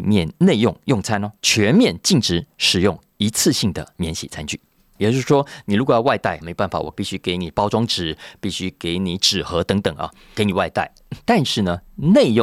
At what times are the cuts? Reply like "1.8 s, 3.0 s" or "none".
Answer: 1.4 s, 4.7 s, 6.4 s